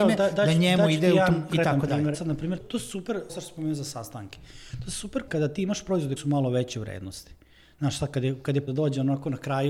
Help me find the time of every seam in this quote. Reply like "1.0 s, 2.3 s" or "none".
1.5 s, 2.1 s, 2.6 s, 3.3 s, 5.3 s, 6.2 s, 8.7 s